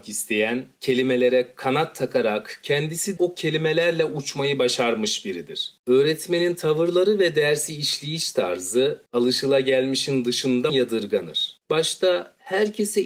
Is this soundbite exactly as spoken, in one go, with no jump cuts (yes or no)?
no